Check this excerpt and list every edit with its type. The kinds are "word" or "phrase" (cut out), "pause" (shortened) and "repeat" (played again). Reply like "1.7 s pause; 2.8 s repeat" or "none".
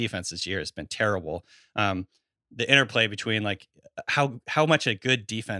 none

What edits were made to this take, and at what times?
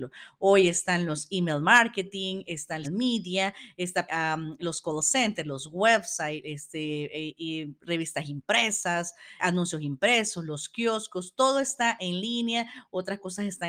2.8 s word; 4.1 s word; 7.8 s pause; 9.4 s word

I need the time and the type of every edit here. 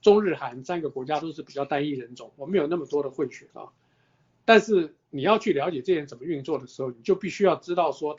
3.5 s pause

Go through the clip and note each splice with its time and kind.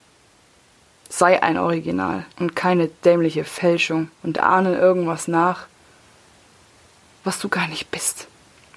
2.3 s pause; 4.1 s pause

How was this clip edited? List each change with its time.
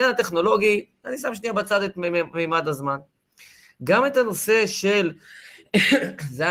none

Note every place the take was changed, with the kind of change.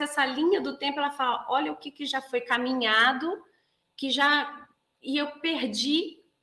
none

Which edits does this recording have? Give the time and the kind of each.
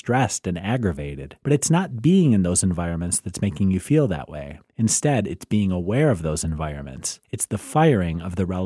1.4 s pause; 4.7 s pause; 7.2 s pause

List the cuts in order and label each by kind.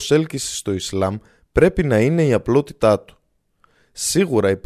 none

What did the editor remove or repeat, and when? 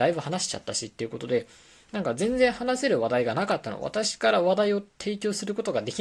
none

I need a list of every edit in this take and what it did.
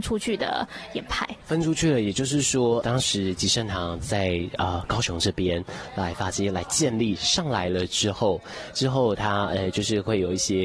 2.8 s word

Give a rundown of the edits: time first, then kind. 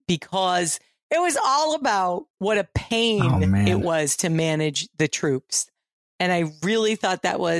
none

